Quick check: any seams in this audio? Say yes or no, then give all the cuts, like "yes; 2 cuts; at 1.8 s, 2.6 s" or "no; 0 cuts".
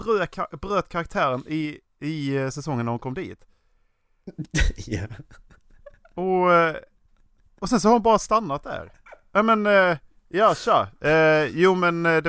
no; 0 cuts